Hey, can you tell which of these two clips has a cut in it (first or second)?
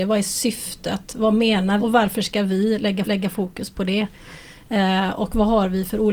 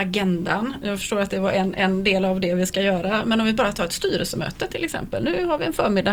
first